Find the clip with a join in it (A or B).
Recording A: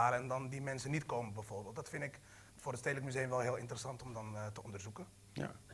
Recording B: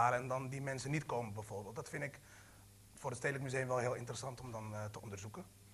A